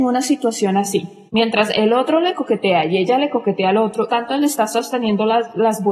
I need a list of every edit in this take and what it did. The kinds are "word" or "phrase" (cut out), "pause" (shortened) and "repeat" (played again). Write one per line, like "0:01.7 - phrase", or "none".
0:01.3 - pause
0:04.1 - phrase